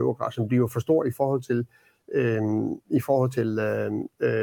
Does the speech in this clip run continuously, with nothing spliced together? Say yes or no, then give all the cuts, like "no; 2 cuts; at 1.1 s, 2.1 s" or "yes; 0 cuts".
yes; 0 cuts